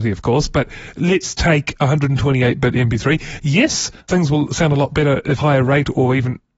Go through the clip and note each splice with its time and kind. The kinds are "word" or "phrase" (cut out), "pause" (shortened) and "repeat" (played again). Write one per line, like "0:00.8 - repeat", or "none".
0:04.0 - pause
0:05.4 - phrase